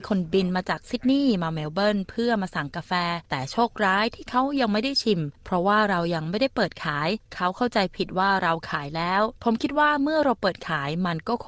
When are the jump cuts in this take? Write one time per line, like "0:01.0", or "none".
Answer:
0:03.2